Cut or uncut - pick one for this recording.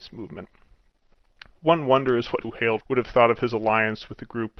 cut